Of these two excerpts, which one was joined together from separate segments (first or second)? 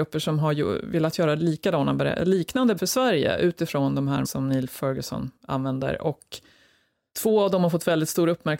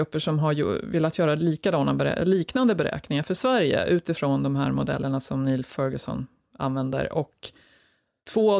first